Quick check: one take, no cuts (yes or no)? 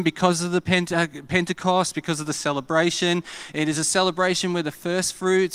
yes